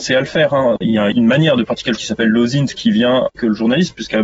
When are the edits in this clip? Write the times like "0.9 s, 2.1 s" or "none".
2.0 s, 3.3 s